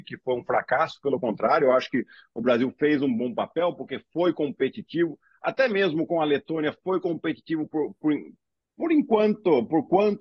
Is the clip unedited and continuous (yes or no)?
yes